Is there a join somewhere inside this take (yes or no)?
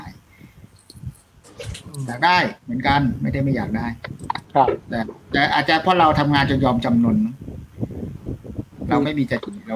yes